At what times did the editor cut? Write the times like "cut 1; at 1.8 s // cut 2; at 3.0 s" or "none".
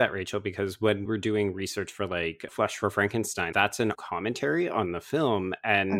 cut 1; at 1.1 s // cut 2; at 2.5 s // cut 3; at 3.5 s // cut 4; at 3.9 s